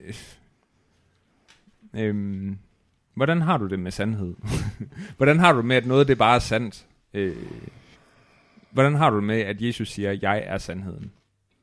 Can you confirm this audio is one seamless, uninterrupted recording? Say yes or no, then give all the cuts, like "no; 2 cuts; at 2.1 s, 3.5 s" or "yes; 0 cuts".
yes; 0 cuts